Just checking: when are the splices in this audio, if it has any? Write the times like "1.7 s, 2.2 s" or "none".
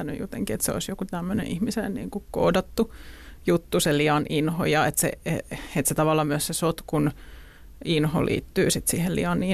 none